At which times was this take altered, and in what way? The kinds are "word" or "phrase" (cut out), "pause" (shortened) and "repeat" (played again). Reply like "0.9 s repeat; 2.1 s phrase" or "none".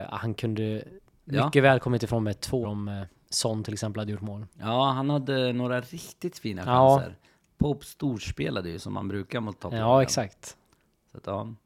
2.6 s word